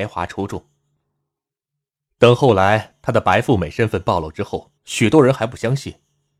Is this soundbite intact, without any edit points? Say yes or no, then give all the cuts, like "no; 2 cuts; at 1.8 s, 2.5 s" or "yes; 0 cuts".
no; 1 cut; at 4.8 s